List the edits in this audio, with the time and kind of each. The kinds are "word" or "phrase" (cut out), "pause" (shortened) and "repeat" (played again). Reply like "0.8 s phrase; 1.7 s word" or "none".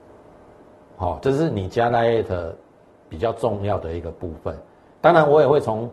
none